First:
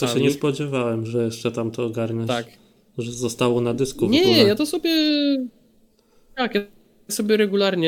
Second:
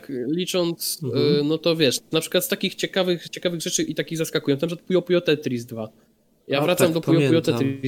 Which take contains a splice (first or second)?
second